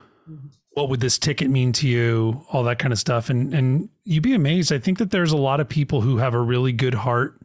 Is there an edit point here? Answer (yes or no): no